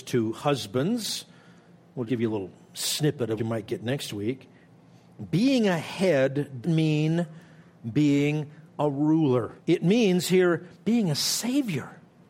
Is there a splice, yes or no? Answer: yes